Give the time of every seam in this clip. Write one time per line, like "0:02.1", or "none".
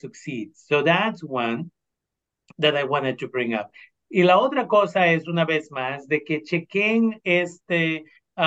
none